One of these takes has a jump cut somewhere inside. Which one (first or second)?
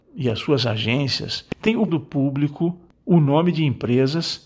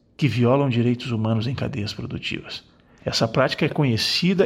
first